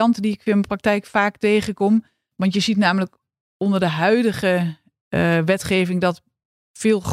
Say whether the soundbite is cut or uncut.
uncut